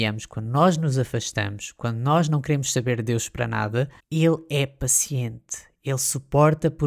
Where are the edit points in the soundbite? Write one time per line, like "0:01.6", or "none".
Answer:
0:04.0